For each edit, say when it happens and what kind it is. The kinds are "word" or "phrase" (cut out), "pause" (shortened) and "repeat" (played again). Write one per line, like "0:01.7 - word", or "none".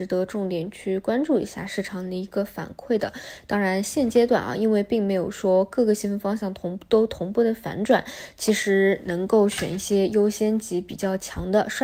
none